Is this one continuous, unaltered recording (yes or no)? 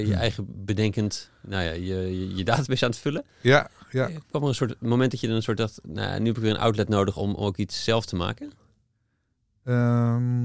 yes